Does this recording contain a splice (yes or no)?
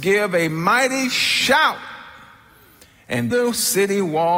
yes